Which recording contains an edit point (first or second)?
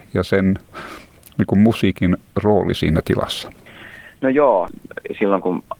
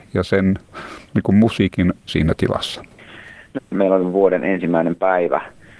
second